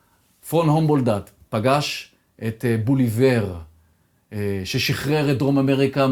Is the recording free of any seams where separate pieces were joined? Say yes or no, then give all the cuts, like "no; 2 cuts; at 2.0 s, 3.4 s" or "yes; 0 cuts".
yes; 0 cuts